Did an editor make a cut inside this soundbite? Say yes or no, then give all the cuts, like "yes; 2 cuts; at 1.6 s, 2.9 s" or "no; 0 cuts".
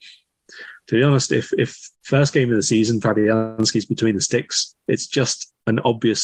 yes; 1 cut; at 1.9 s